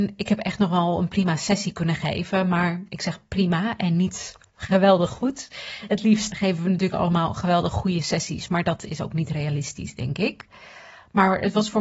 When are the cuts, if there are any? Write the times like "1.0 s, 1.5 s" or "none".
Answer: 6.3 s